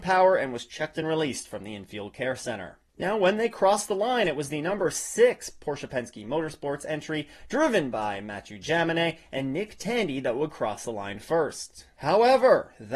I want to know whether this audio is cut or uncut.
uncut